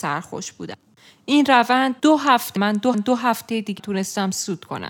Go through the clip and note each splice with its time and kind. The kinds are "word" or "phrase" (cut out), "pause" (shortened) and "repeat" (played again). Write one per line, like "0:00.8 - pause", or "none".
0:02.0 - pause
0:02.6 - phrase
0:02.9 - repeat
0:03.8 - word